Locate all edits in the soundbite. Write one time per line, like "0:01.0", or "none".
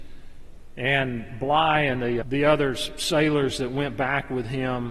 0:02.2